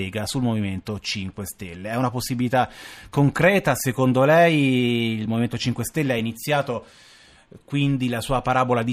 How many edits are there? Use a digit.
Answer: 0